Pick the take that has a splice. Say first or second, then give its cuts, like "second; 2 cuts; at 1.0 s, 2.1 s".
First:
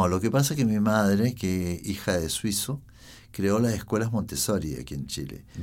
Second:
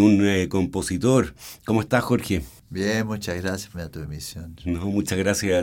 second; 1 cut; at 3.7 s